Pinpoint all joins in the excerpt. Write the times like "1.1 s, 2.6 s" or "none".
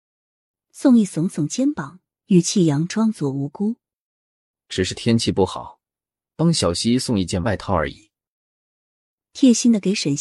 none